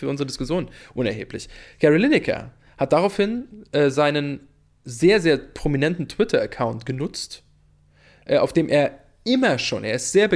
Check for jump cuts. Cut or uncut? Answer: uncut